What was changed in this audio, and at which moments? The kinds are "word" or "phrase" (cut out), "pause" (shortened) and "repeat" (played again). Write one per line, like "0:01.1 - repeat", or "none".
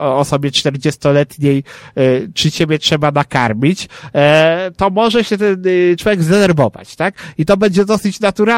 none